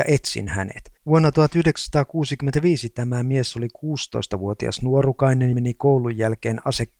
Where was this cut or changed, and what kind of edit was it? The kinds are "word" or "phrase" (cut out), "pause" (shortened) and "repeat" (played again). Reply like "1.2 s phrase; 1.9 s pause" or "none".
1.0 s pause; 5.5 s word